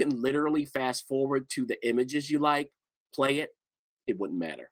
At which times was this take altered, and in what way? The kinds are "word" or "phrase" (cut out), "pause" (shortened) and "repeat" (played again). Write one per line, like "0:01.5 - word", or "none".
none